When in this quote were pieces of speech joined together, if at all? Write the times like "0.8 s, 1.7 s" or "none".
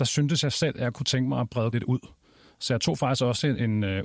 0.9 s, 1.7 s